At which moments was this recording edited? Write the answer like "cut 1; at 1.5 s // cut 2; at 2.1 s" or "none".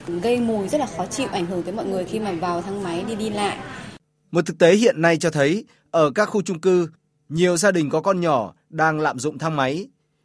none